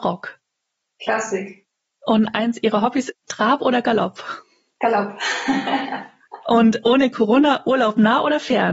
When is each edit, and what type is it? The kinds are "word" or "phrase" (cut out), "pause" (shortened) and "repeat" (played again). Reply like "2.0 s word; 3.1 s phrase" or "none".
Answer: 3.1 s phrase